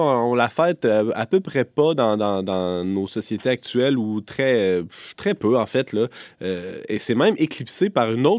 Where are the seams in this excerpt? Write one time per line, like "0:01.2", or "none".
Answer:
none